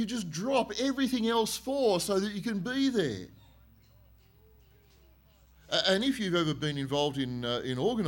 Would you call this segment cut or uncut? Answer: uncut